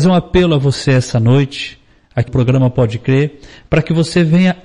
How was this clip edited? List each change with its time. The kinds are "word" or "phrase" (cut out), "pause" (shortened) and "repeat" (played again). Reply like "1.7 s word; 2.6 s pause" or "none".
2.3 s phrase